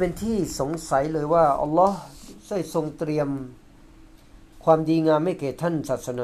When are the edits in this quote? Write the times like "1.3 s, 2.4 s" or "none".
4.5 s